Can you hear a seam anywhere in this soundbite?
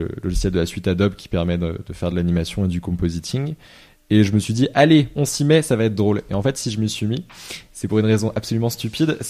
no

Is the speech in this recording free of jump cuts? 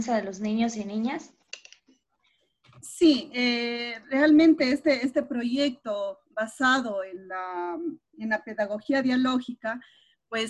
yes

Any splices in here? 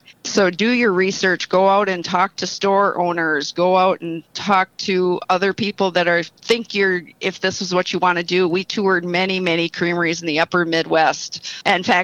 no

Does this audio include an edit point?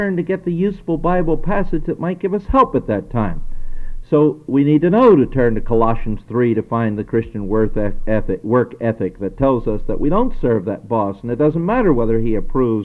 no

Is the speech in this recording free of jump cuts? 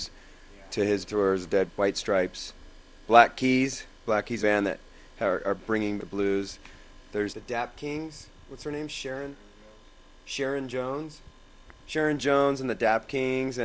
no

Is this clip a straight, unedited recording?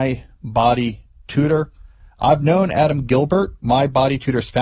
yes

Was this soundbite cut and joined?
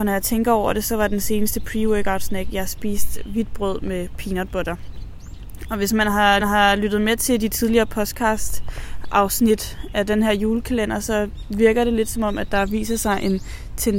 yes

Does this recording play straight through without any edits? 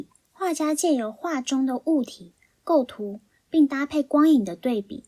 yes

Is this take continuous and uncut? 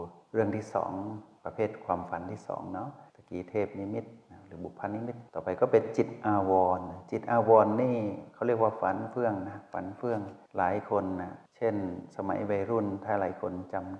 no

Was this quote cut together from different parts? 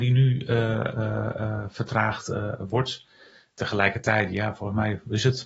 no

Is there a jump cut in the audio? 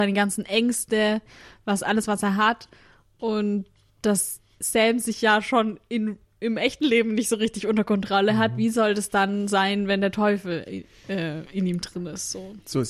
no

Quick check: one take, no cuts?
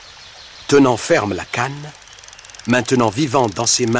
yes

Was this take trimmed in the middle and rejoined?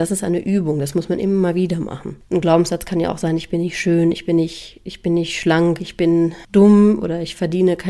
no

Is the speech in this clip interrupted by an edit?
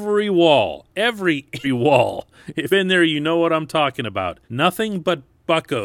yes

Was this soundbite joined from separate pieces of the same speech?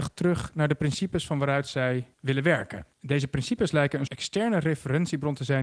yes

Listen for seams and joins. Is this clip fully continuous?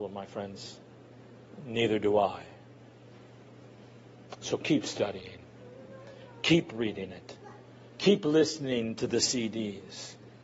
yes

